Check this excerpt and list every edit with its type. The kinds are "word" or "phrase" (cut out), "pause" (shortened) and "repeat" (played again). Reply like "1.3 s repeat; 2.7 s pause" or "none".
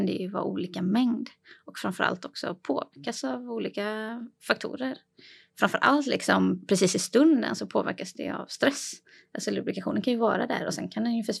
none